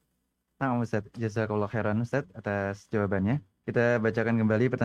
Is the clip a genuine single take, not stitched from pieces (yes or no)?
no